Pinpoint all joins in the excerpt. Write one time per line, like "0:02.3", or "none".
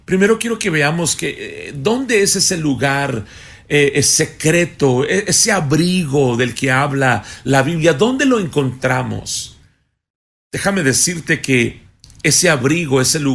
none